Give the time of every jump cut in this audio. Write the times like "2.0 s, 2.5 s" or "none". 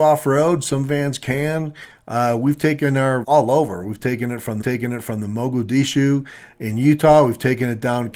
3.2 s, 4.6 s